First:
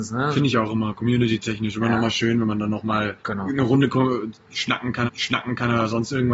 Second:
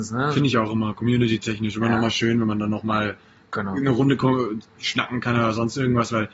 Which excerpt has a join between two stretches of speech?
first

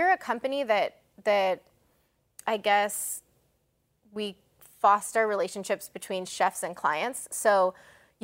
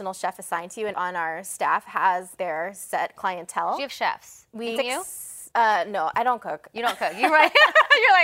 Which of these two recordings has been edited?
second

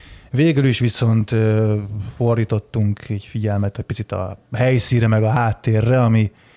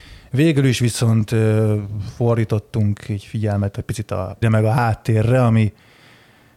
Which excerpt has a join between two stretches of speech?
second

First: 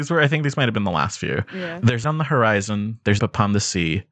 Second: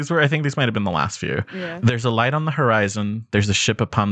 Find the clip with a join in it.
first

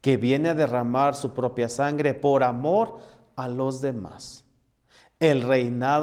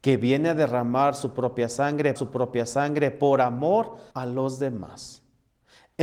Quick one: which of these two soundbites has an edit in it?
second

